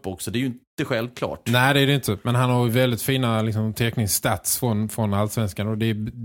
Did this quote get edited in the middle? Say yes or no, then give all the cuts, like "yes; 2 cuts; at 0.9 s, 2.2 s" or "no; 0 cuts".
no; 0 cuts